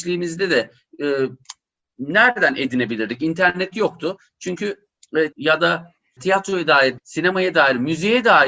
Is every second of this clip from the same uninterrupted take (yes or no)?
no